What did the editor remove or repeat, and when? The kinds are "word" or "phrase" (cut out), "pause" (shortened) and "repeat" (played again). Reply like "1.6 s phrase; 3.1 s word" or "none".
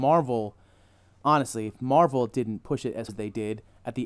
3.1 s word